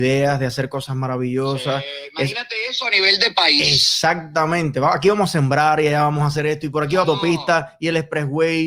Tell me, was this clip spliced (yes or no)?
yes